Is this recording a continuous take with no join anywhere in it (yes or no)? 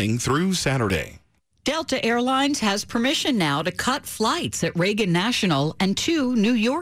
no